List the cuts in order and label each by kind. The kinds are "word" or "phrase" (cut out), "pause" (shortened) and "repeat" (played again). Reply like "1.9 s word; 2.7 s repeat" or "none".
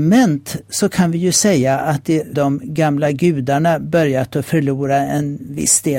2.3 s phrase